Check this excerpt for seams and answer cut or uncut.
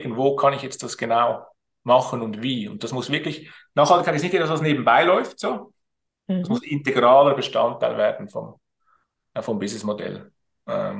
uncut